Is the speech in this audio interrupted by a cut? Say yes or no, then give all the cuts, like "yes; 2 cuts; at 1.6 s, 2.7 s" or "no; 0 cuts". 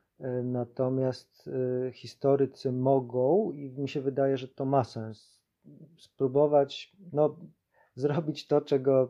no; 0 cuts